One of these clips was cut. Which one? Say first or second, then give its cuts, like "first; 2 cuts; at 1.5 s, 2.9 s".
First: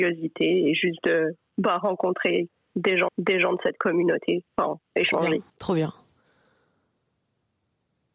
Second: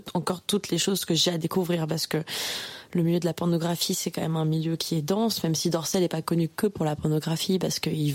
first; 2 cuts; at 3.1 s, 5.5 s